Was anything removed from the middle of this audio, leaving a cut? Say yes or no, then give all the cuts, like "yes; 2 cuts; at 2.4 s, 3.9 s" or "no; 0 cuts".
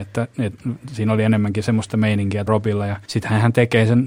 yes; 3 cuts; at 1.9 s, 2.5 s, 3.0 s